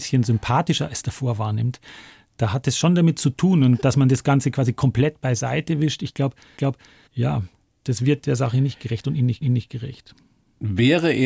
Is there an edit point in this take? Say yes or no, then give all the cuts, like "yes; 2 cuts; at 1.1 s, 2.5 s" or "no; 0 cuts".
yes; 2 cuts; at 6.6 s, 9.4 s